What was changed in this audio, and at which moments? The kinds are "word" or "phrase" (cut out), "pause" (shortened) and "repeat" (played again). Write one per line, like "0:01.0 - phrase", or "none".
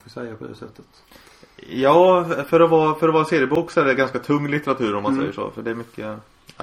none